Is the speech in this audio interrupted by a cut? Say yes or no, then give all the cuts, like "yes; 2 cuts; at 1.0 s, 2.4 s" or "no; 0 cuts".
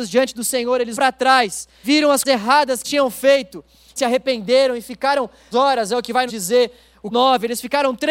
yes; 8 cuts; at 0.9 s, 1.8 s, 2.2 s, 2.8 s, 4.0 s, 5.5 s, 6.3 s, 7.1 s